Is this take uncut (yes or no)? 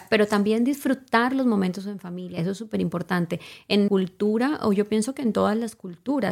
no